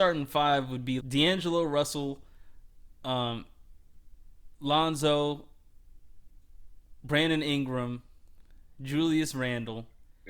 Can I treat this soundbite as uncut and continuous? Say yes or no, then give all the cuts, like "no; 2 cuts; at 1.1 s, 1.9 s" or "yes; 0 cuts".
no; 1 cut; at 1.0 s